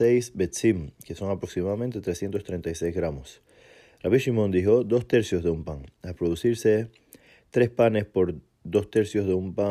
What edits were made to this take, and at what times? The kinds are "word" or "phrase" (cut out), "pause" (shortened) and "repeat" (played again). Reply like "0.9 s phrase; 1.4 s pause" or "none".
none